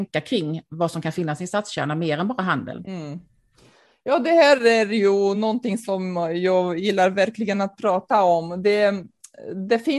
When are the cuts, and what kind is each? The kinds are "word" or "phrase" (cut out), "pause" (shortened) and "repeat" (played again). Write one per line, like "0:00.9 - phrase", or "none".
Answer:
none